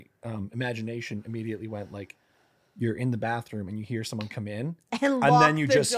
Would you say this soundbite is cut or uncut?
uncut